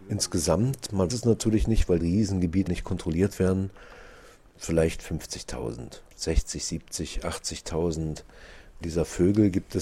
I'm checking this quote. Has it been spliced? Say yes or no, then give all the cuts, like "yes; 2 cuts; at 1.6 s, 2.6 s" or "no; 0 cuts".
yes; 5 cuts; at 1.1 s, 2.0 s, 2.7 s, 6.1 s, 8.8 s